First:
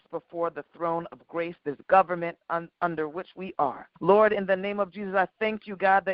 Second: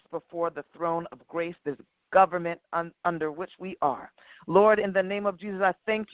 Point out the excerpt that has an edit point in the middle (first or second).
first